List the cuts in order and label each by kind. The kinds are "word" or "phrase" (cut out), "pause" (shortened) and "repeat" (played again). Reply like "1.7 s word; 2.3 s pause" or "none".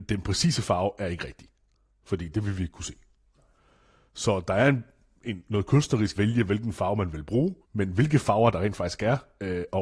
6.2 s phrase; 7.6 s pause